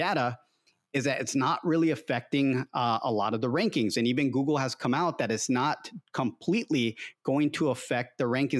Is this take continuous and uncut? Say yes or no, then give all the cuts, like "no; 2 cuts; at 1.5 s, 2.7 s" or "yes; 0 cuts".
yes; 0 cuts